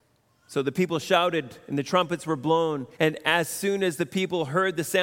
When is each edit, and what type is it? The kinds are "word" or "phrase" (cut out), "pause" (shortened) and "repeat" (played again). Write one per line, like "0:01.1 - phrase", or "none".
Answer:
0:02.9 - pause